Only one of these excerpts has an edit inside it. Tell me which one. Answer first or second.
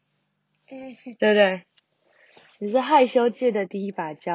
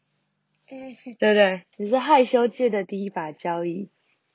second